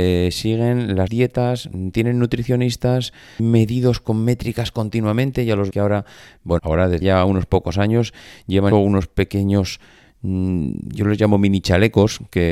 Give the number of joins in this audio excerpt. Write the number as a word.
six